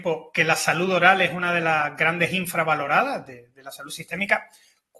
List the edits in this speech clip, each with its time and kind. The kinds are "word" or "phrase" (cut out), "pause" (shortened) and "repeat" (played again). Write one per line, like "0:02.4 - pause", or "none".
none